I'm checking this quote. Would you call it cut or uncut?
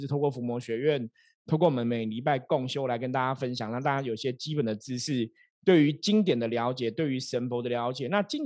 uncut